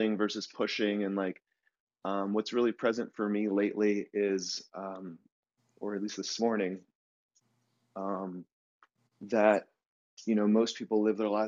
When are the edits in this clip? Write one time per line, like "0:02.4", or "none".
none